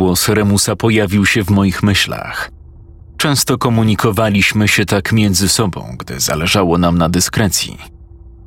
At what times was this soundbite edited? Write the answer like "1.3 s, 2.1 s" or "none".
none